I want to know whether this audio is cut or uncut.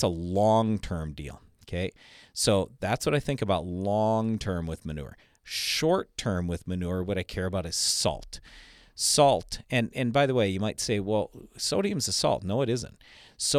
uncut